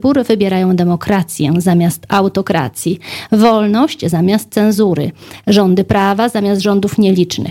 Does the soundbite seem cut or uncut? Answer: uncut